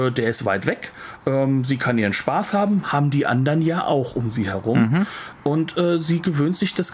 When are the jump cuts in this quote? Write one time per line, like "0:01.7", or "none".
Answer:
none